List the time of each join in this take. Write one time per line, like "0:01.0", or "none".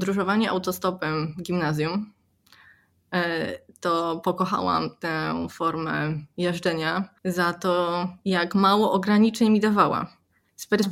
0:07.2